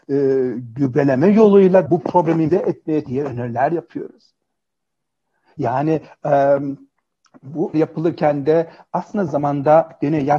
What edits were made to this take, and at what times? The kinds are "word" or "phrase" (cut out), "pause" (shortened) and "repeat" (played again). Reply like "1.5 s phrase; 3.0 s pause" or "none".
1.9 s word; 2.5 s word; 3.1 s word; 7.7 s word; 9.3 s word